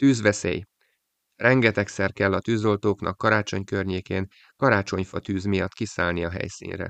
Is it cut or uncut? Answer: uncut